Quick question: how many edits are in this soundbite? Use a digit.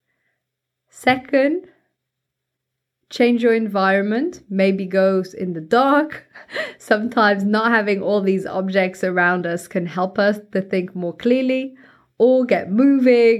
0